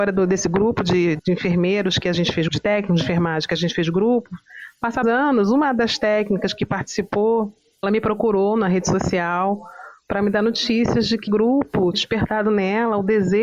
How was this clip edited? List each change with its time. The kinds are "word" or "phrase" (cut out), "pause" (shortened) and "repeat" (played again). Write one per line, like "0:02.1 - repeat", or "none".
0:01.2 - word
0:02.5 - word
0:05.0 - word
0:07.8 - word
0:11.3 - word
0:11.9 - word